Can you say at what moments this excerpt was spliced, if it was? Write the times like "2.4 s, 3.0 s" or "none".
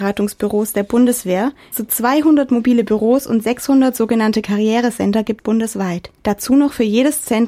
1.7 s, 5.4 s, 6.2 s